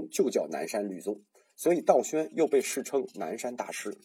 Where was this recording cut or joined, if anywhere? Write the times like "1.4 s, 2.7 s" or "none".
none